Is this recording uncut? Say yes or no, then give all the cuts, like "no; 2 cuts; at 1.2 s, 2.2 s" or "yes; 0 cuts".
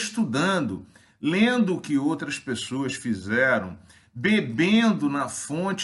yes; 0 cuts